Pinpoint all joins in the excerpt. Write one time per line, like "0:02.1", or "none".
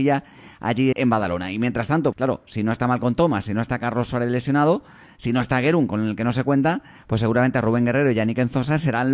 0:00.9
0:02.1